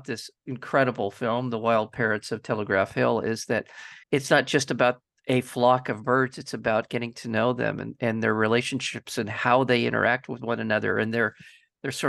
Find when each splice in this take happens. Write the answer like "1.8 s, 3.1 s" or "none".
4.0 s